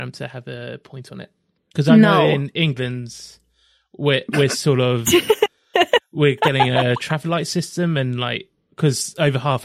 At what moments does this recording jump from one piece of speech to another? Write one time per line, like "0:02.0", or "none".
0:01.6